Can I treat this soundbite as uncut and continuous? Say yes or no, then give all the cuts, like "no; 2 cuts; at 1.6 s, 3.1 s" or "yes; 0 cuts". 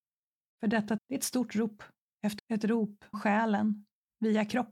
no; 3 cuts; at 1.0 s, 2.4 s, 3.1 s